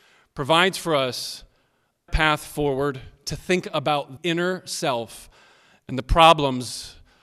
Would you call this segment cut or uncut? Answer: cut